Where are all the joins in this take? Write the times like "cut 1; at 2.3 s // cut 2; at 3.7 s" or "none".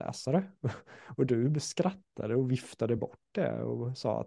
none